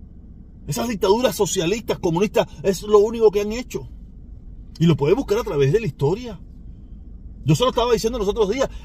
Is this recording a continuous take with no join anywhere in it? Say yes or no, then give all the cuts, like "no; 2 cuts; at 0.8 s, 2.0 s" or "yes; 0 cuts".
yes; 0 cuts